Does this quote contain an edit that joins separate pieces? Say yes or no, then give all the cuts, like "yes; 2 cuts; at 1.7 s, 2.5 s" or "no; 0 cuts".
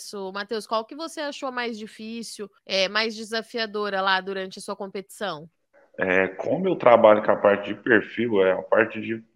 yes; 2 cuts; at 2.6 s, 5.7 s